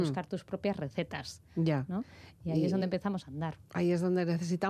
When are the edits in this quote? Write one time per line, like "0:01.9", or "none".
none